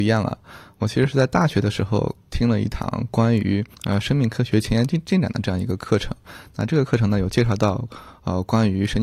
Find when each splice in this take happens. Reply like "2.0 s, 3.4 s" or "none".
3.7 s